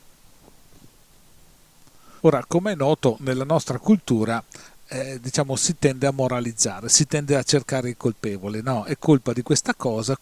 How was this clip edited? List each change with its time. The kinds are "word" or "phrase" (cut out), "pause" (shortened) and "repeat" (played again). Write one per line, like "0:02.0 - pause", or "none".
0:02.2 - pause